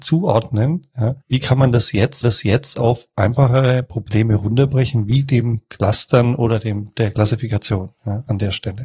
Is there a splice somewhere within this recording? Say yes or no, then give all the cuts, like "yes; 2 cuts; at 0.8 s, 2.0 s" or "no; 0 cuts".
yes; 2 cuts; at 1.2 s, 2.2 s